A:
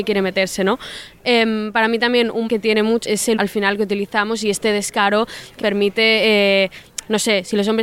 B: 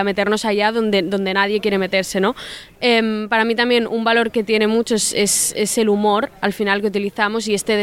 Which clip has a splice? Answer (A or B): A